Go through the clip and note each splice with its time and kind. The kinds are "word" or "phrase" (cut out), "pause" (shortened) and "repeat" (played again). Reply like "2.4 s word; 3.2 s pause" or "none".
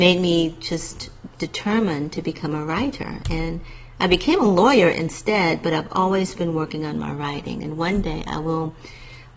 none